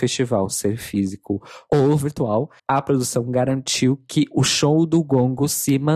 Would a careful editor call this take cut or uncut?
cut